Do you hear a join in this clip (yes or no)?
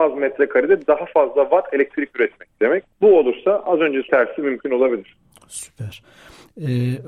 yes